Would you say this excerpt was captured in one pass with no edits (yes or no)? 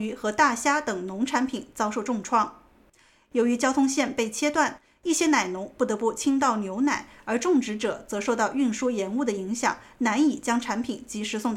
yes